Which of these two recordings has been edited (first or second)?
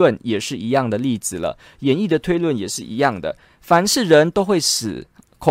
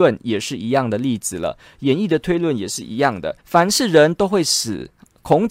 second